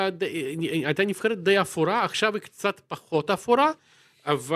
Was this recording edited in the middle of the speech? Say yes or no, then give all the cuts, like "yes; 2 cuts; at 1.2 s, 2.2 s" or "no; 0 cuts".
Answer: no; 0 cuts